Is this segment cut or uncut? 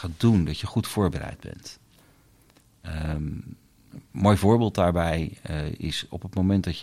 uncut